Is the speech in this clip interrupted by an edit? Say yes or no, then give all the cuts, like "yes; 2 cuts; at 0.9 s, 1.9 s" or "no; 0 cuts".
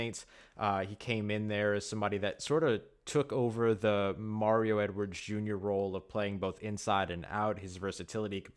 no; 0 cuts